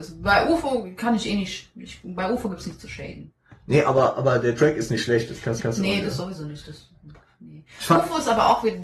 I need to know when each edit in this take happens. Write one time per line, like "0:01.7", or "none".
0:03.4
0:05.6